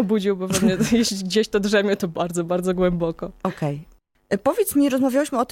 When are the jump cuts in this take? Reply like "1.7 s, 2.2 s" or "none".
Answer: none